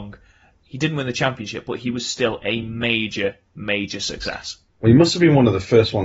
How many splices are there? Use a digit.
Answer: 0